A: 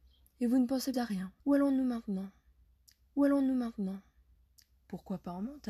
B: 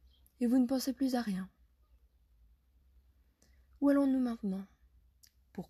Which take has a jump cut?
A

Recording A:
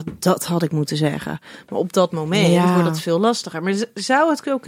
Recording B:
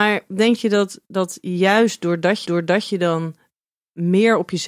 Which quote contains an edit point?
B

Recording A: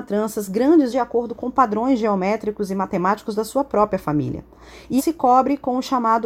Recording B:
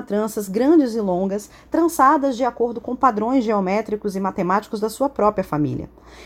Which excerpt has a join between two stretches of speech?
A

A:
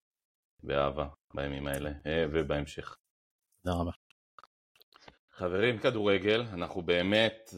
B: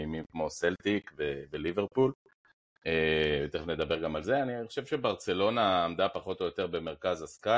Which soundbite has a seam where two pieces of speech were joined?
A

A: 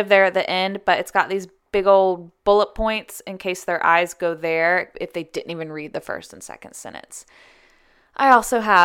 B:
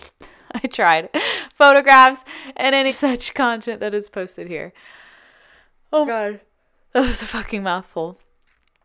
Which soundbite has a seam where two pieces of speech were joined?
B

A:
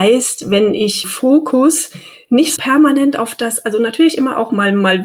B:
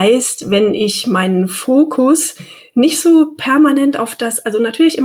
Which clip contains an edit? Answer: A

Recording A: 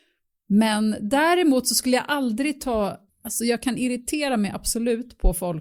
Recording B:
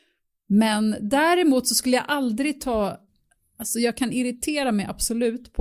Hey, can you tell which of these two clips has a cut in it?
A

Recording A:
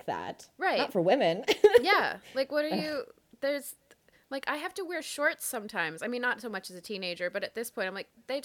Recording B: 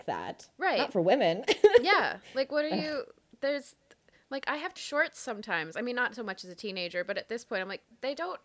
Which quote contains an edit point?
B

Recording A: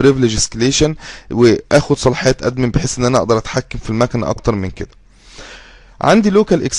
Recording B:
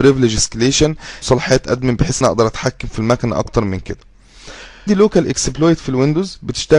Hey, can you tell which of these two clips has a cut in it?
B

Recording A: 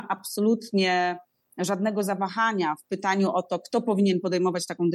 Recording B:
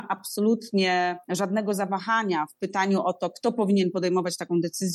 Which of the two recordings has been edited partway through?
B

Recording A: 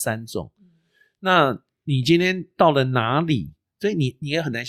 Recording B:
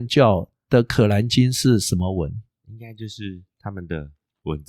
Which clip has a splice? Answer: B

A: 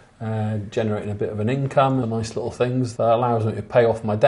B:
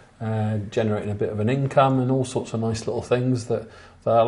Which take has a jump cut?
A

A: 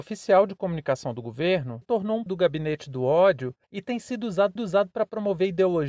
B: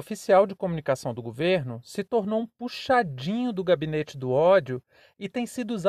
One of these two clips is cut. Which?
A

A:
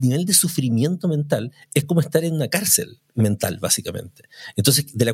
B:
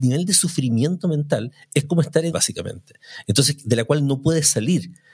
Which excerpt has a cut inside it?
B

